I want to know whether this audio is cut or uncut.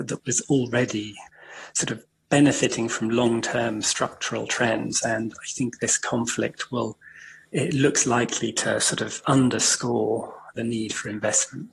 uncut